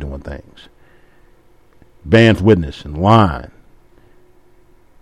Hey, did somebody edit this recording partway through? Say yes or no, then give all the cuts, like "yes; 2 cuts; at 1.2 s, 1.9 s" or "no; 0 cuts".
yes; 1 cut; at 2.4 s